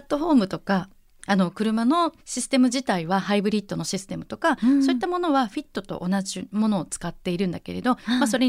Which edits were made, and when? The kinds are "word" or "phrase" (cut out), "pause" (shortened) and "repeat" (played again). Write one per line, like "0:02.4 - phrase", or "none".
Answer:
0:02.2 - pause